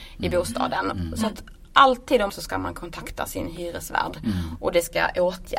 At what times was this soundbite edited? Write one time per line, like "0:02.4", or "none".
0:02.3

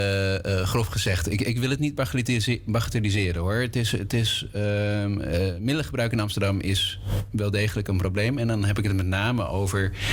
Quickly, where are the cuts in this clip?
none

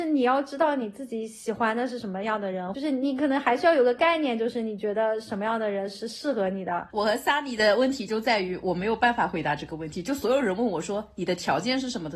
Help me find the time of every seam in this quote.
none

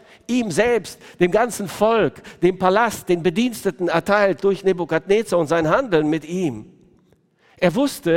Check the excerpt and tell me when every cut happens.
none

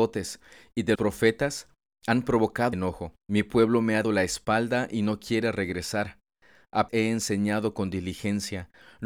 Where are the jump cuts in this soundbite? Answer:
0:00.9
0:02.7
0:03.2
0:04.0
0:06.9

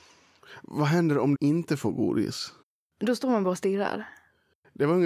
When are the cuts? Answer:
0:01.3
0:02.6

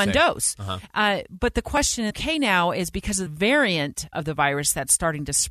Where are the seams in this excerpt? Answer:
0:02.1
0:03.3
0:04.1

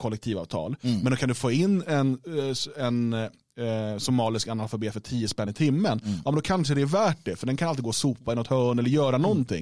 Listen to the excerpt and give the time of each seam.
none

